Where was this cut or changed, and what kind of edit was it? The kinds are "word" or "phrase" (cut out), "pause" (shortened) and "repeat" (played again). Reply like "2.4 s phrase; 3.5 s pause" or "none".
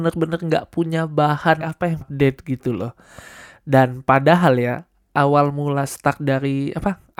1.6 s word; 2.0 s phrase